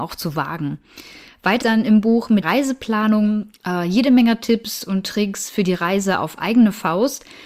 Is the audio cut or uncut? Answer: cut